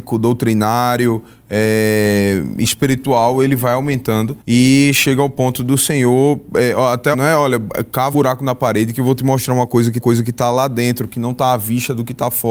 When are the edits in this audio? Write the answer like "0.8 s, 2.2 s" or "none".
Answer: 4.4 s, 7.1 s, 8.1 s, 10.0 s